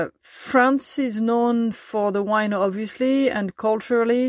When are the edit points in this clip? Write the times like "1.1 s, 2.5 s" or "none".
none